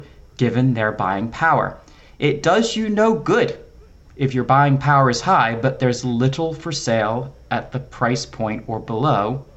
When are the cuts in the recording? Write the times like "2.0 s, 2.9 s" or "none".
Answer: none